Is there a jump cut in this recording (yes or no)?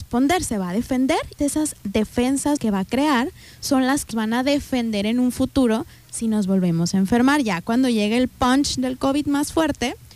yes